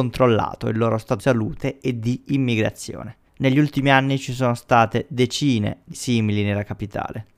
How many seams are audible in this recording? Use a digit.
3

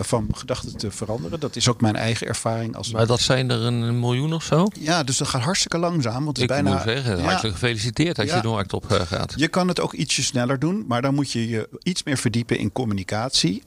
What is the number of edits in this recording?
0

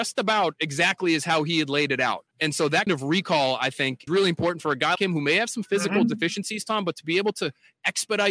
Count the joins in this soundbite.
4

